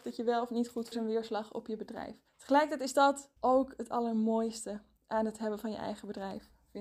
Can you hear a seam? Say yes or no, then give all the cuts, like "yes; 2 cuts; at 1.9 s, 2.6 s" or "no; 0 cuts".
yes; 3 cuts; at 0.9 s, 2.3 s, 3.4 s